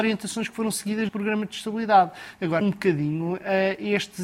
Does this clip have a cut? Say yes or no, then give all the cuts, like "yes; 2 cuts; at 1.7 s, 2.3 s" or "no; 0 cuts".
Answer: yes; 2 cuts; at 1.1 s, 2.6 s